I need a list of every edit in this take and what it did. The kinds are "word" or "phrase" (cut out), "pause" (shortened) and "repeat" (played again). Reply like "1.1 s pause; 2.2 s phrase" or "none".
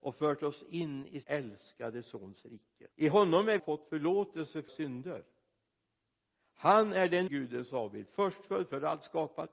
1.2 s word; 2.9 s pause; 3.6 s phrase; 4.7 s word; 7.3 s word